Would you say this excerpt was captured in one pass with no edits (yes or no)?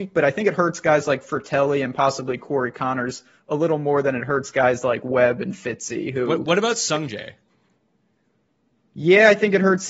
yes